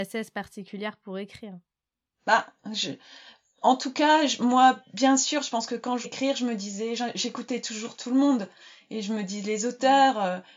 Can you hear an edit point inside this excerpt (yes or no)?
yes